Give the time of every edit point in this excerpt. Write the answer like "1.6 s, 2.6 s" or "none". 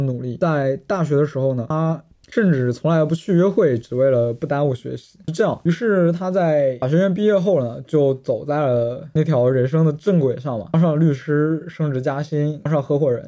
none